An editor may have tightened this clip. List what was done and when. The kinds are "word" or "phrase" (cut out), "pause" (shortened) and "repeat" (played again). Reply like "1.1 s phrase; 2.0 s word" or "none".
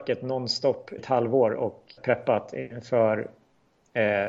1.0 s word; 2.0 s word